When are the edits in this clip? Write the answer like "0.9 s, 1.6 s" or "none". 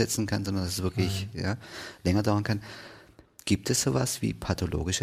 none